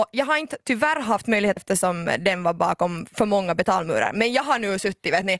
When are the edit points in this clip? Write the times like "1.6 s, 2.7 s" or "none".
1.6 s